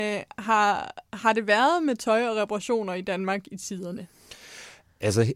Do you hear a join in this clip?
yes; 1 cut; at 1.0 s

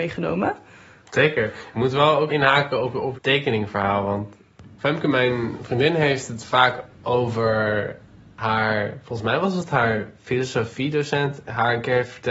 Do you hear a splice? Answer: yes; 2 cuts; at 2.3 s, 3.1 s

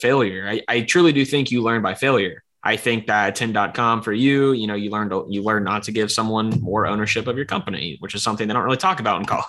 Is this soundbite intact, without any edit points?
no; 1 cut; at 2.5 s

